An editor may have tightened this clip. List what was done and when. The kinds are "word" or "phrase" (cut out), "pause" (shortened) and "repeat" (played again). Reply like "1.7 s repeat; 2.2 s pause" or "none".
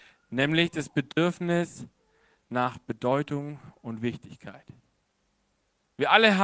none

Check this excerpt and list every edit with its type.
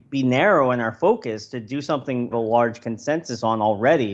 2.3 s phrase

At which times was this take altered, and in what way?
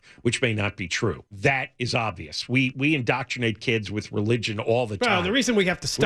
1.3 s pause; 2.7 s word

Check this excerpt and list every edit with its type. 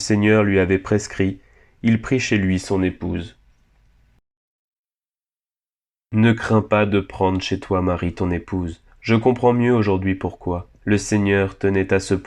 8.9 s pause; 10.8 s pause

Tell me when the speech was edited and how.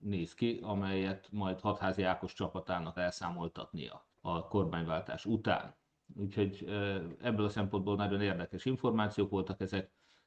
3.0 s word; 4.1 s pause

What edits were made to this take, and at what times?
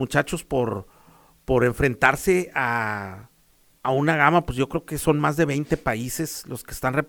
none

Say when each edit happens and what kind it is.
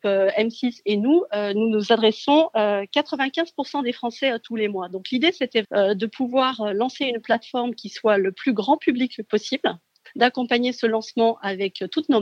5.6 s word

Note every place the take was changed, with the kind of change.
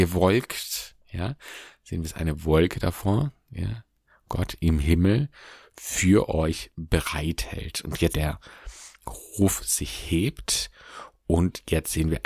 8.1 s phrase

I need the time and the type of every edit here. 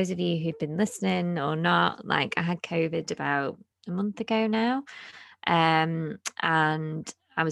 3.7 s pause

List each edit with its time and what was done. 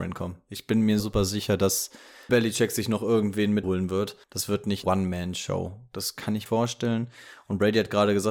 1.0 s word; 2.3 s word; 3.6 s word; 4.2 s pause; 4.8 s word; 6.5 s phrase

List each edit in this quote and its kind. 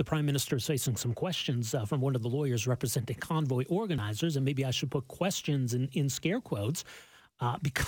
none

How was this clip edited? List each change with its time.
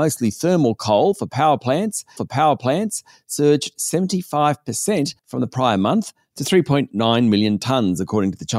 2.2 s repeat; 5.2 s pause

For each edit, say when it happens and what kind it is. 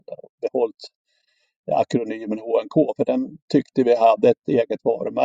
none

